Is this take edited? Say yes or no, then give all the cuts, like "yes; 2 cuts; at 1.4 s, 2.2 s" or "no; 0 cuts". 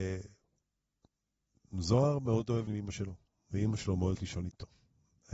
yes; 2 cuts; at 2.7 s, 4.1 s